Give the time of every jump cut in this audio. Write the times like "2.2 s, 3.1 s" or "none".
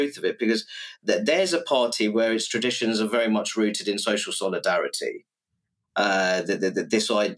none